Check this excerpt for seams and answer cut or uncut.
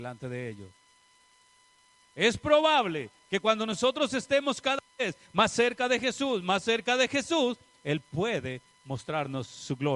uncut